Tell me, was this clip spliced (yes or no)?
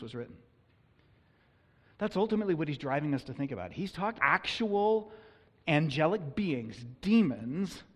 yes